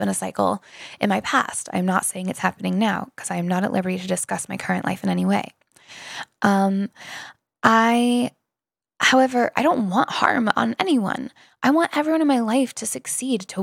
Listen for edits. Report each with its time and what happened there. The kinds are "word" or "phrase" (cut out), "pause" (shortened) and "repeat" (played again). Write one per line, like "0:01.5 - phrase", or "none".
none